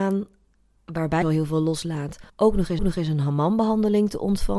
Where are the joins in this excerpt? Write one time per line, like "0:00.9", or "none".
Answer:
0:01.2
0:02.3
0:02.8